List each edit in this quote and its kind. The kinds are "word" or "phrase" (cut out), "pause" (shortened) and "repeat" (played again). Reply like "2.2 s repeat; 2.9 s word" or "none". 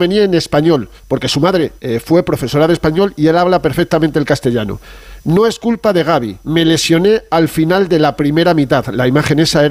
1.0 s pause; 1.8 s pause; 6.4 s pause